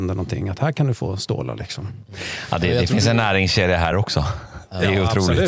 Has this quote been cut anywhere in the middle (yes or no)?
no